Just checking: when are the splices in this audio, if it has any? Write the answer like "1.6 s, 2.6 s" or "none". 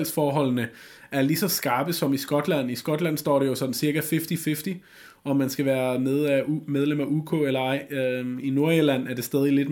8.4 s